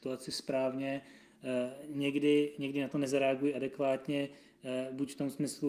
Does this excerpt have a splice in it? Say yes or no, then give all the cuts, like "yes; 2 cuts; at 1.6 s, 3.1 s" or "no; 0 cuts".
no; 0 cuts